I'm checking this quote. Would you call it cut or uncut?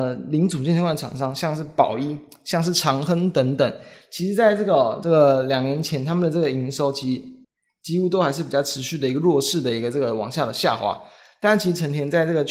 uncut